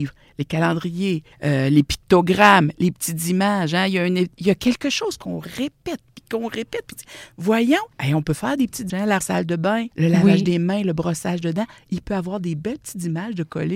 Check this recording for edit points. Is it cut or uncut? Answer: cut